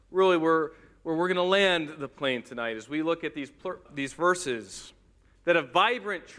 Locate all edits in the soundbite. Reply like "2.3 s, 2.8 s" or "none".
3.9 s